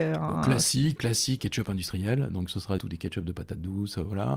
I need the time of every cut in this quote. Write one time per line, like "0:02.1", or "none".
0:01.0
0:01.4
0:02.8